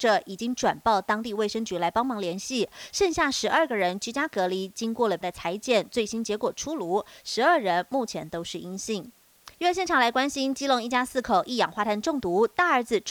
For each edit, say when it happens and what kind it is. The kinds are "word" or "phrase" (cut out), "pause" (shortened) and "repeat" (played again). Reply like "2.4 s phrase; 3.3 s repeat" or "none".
5.2 s word; 9.5 s pause